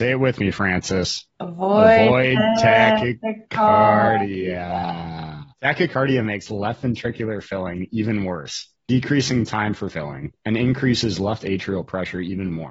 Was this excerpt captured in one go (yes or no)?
no